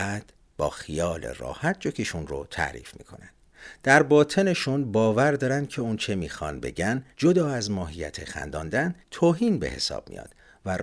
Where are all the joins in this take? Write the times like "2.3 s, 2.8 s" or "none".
7.1 s, 9.0 s